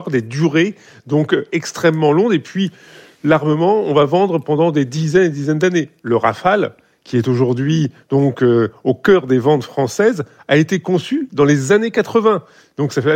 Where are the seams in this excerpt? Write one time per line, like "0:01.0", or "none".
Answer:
none